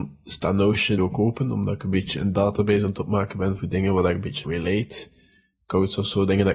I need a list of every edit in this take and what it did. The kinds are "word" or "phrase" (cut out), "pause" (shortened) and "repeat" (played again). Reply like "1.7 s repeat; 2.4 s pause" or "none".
1.0 s word; 4.4 s word